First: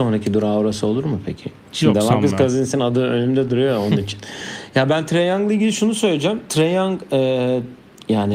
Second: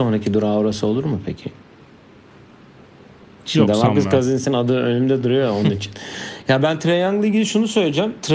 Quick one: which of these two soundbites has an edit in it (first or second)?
first